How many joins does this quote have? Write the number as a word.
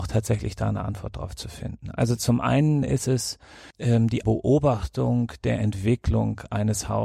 two